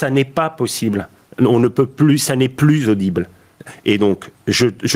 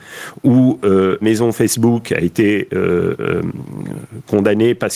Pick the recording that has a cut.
second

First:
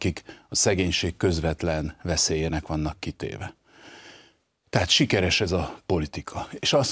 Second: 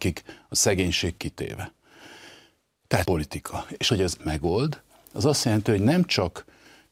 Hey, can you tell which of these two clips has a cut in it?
second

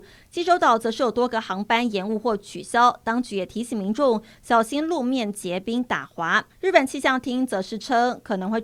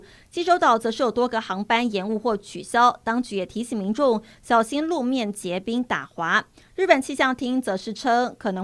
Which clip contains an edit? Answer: first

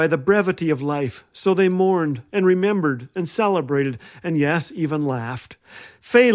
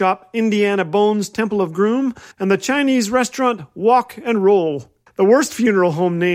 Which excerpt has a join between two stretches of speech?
second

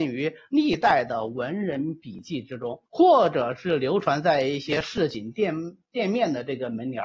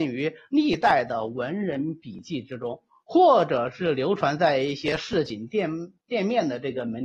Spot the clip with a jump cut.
first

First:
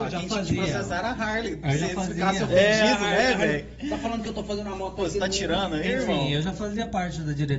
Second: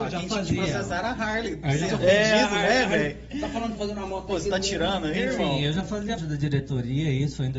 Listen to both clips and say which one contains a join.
second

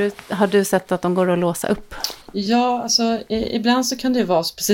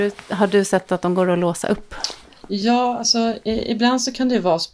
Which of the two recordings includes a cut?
first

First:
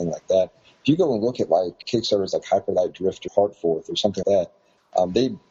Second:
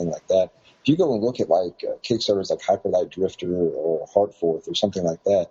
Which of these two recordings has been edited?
first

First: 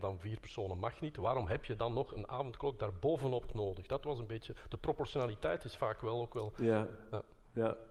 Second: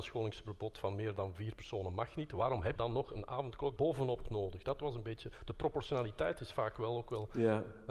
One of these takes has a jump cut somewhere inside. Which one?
second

